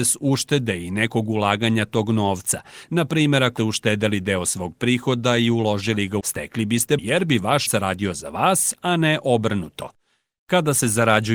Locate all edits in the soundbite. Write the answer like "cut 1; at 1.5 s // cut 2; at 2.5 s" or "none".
cut 1; at 3.6 s // cut 2; at 6.2 s // cut 3; at 7.0 s // cut 4; at 7.7 s